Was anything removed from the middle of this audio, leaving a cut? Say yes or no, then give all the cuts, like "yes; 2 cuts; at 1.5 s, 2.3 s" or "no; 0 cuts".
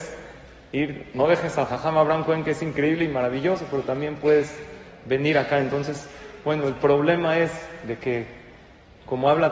no; 0 cuts